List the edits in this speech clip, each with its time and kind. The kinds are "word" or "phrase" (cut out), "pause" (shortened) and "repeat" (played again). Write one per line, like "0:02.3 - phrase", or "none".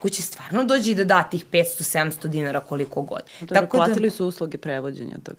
0:03.3 - pause